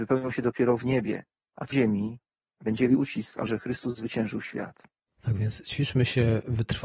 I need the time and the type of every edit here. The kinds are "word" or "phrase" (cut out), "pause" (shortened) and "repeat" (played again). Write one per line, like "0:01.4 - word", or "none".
0:01.7 - word
0:02.9 - word
0:03.5 - word